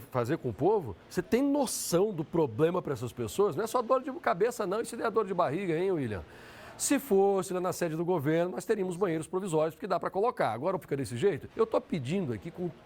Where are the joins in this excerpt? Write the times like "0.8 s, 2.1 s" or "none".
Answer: 1.0 s, 10.8 s, 11.5 s